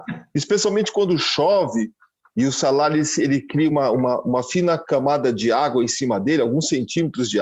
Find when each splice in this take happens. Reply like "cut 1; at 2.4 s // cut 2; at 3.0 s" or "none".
none